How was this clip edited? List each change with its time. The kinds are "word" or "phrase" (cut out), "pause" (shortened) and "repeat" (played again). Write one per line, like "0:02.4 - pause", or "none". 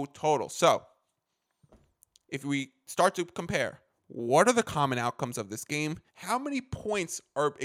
0:06.1 - pause